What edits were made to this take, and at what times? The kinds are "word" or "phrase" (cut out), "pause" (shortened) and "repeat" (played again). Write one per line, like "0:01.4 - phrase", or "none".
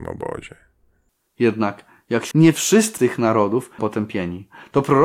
0:02.3 - word
0:03.0 - word
0:03.8 - word

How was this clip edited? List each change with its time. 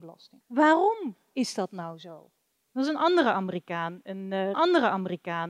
0:04.5 - repeat

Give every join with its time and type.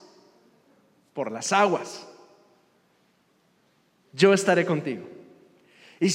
none

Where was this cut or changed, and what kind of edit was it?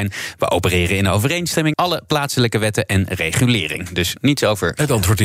0:01.7 - word

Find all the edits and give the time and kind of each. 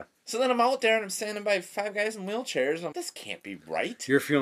0:02.9 - word

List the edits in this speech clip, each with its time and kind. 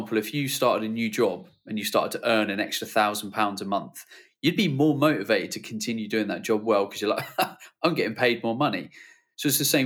none

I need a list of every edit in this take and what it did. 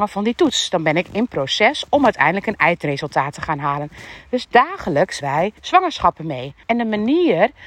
0:05.2 - word
0:05.6 - pause
0:06.6 - pause

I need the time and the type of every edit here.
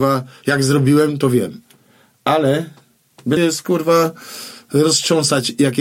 0:03.4 - word

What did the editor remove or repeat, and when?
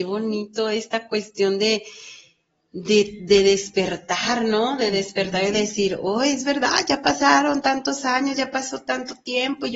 none

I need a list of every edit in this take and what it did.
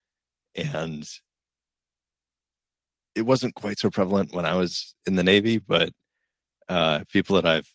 none

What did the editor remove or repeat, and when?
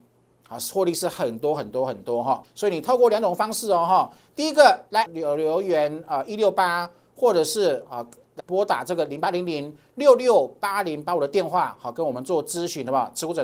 0:02.4 - word
0:05.1 - word
0:08.4 - word

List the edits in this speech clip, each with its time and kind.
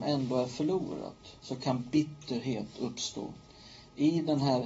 0:01.4 - pause

